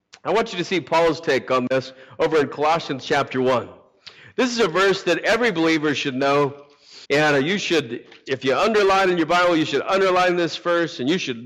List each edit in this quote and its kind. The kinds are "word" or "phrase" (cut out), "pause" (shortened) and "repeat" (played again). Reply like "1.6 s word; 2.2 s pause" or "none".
7.0 s pause